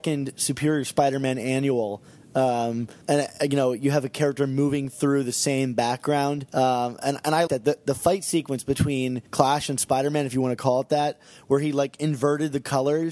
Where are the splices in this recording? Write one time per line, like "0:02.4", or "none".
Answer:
0:03.0
0:06.5
0:07.5
0:09.3